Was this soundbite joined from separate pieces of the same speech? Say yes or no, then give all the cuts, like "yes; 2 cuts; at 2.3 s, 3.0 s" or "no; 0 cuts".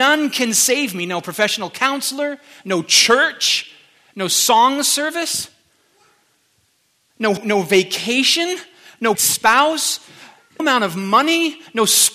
yes; 3 cuts; at 7.4 s, 9.1 s, 10.6 s